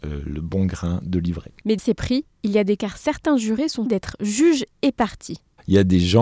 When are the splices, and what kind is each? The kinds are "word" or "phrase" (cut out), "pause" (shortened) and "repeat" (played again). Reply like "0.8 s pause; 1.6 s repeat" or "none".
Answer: 1.8 s word; 2.8 s word; 3.9 s word